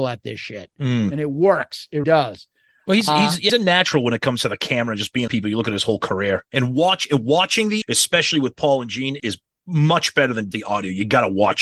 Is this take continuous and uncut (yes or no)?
no